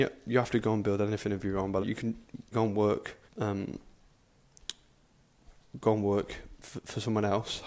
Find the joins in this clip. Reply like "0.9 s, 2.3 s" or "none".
1.8 s, 2.5 s, 3.3 s